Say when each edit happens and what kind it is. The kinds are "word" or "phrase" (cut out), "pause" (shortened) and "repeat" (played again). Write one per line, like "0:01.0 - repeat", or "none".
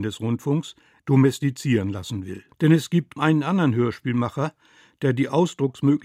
0:01.0 - word
0:02.5 - pause
0:03.2 - word

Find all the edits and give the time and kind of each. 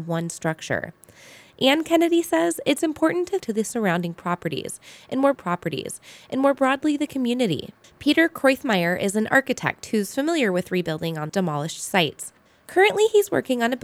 0:03.4 - phrase
0:05.3 - repeat
0:07.8 - pause
0:11.3 - word

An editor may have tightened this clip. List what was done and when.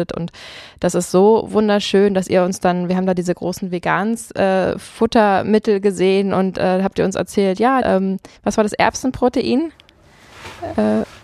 0:07.8 - phrase
0:08.4 - pause

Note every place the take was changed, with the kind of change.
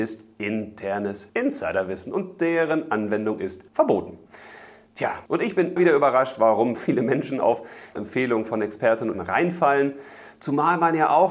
0:01.3 - word
0:03.7 - pause
0:05.3 - pause
0:05.8 - word
0:06.8 - word
0:08.0 - phrase
0:09.1 - word

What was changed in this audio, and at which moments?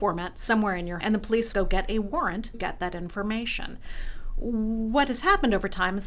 0:01.0 - word
0:01.5 - phrase
0:02.5 - word

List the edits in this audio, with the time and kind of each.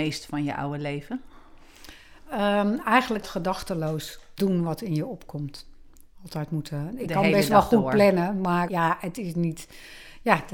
0:03.2 - word
0:04.4 - word
0:08.7 - word

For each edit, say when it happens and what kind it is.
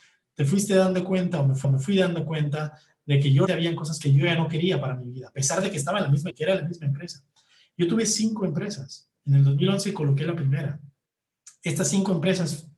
0:01.6 - repeat
0:03.5 - word
0:06.3 - word
0:09.2 - pause

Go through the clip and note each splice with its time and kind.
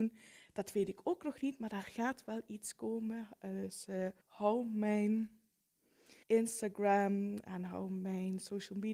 0:04.2 - pause
0:06.2 - pause

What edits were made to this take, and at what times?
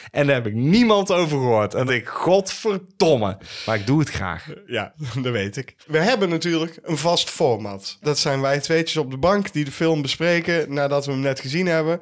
0:01.9 - word
0:05.8 - pause

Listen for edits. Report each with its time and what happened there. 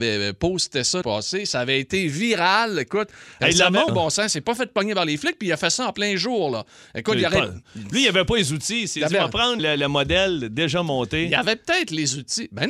0:01.0 - word
0:03.9 - word
0:09.6 - word

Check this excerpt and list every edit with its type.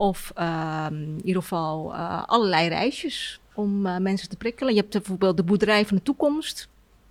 0:03.5 - pause

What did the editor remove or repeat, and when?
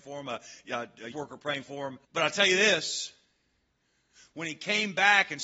0:01.1 - word
0:02.0 - pause

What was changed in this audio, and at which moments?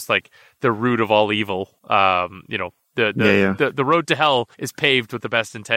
0:01.8 - pause
0:04.5 - pause

